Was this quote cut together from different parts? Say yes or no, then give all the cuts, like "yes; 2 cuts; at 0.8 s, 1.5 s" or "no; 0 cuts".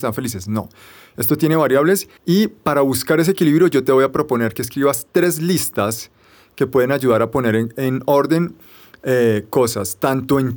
yes; 1 cut; at 2.2 s